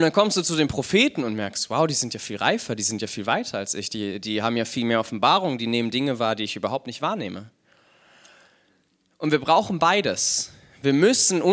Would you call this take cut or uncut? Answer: uncut